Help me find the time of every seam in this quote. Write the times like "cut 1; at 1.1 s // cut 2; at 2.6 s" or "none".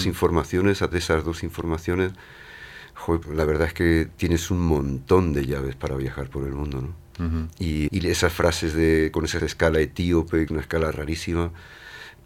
cut 1; at 0.9 s // cut 2; at 3.2 s // cut 3; at 7.9 s // cut 4; at 9.4 s // cut 5; at 10.5 s